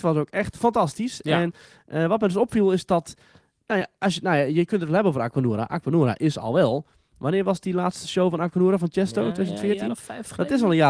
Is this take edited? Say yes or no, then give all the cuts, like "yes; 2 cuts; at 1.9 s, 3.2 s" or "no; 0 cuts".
no; 0 cuts